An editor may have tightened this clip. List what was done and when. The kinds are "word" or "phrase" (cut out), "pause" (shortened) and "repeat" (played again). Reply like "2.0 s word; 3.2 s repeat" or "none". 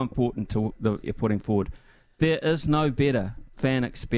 1.0 s phrase